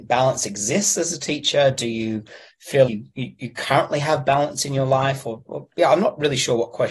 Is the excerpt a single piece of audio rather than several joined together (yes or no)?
no